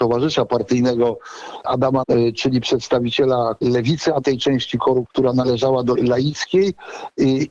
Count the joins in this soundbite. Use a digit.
6